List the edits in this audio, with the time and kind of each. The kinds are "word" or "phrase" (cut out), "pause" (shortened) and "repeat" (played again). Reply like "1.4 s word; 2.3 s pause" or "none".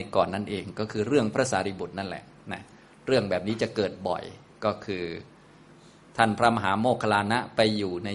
none